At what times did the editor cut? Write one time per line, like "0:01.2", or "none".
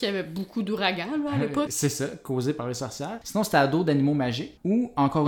0:01.7